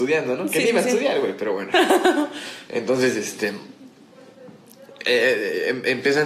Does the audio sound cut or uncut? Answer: uncut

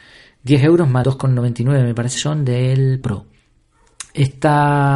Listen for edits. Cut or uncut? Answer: cut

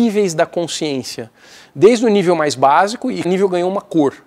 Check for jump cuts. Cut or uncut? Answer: cut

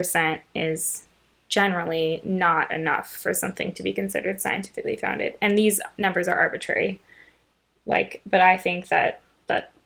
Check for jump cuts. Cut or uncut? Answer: uncut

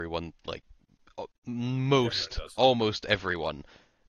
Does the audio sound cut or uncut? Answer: uncut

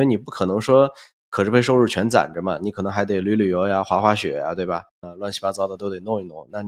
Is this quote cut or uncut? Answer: cut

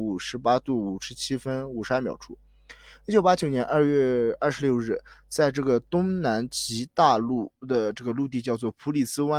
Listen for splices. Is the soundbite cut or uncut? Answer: cut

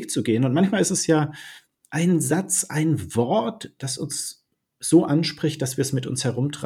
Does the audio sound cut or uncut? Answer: uncut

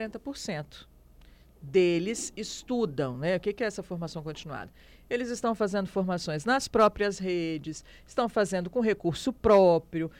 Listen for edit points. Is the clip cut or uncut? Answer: uncut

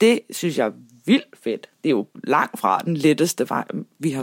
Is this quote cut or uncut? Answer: uncut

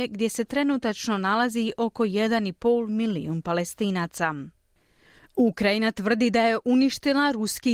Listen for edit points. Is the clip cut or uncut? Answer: uncut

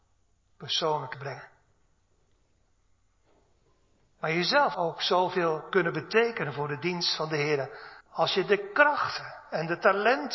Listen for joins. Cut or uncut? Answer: cut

